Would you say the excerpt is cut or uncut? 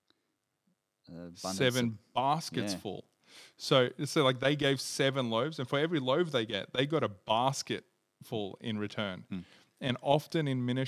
uncut